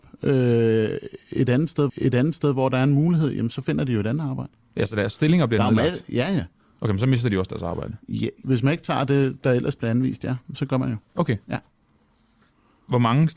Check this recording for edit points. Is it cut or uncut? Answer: cut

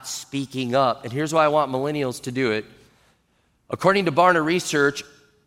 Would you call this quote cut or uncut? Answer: uncut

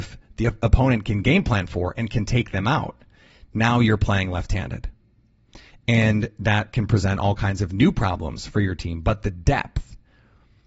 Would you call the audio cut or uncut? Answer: uncut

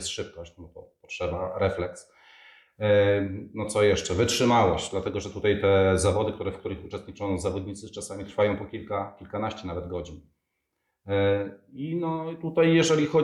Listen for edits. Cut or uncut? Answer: uncut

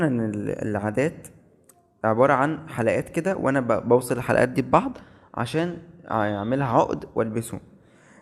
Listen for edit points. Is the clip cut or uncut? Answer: uncut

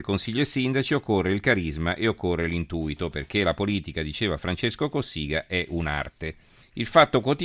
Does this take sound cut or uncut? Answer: uncut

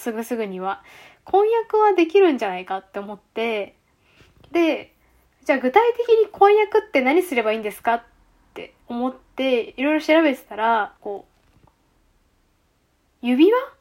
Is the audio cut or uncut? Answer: cut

